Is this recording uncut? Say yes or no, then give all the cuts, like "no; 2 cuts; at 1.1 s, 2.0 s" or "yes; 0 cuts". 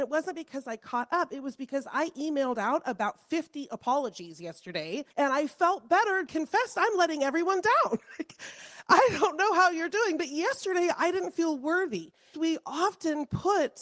no; 3 cuts; at 5.1 s, 6.3 s, 12.3 s